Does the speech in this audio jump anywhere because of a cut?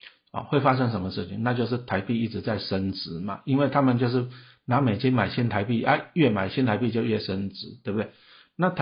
no; 0 cuts

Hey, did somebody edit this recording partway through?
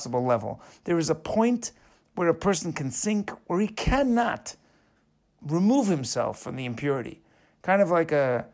no; 0 cuts

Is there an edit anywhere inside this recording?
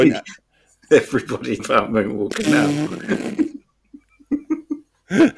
yes; 1 cut; at 1.6 s

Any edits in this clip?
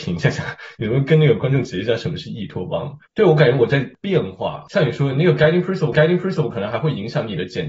yes; 2 cuts; at 3.1 s, 5.9 s

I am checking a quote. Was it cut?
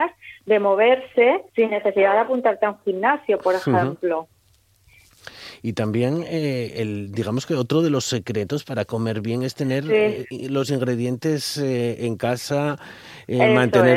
yes; 1 cut; at 1.5 s

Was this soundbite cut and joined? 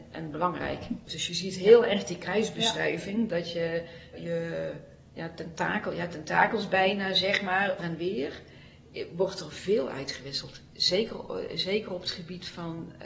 yes; 2 cuts; at 4.1 s, 7.8 s

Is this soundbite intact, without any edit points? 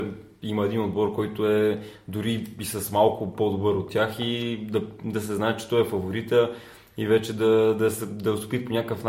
yes; 0 cuts

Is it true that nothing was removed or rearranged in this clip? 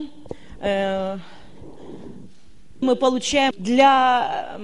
no; 2 cuts; at 2.8 s, 3.5 s

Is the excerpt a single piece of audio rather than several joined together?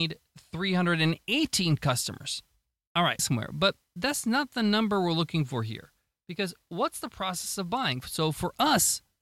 no; 1 cut; at 3.2 s

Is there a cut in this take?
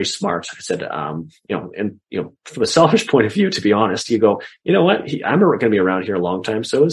no; 0 cuts

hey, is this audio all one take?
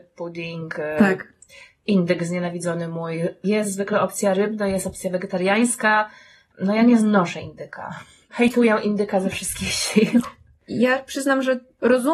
yes; 0 cuts

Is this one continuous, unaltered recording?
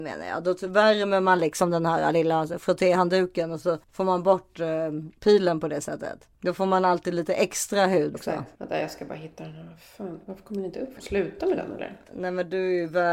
no; 6 cuts; at 3.8 s, 5.2 s, 6.3 s, 8.1 s, 8.6 s, 11.0 s

